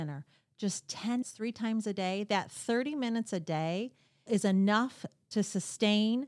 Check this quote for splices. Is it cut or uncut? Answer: cut